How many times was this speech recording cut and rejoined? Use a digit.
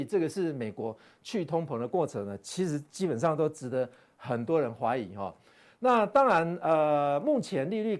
0